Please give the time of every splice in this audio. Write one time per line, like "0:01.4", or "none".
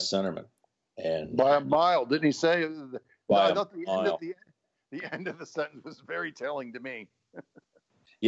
none